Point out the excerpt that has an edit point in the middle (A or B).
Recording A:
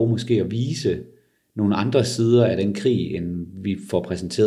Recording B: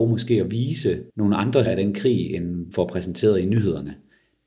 B